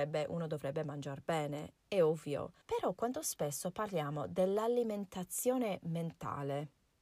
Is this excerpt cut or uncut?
cut